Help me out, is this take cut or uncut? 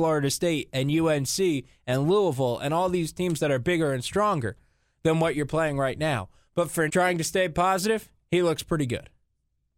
cut